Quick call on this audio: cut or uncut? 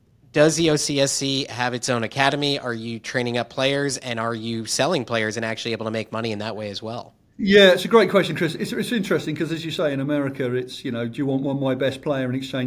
uncut